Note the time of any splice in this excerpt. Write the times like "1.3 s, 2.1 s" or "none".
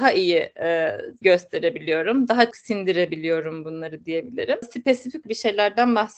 1.2 s, 2.5 s, 5.2 s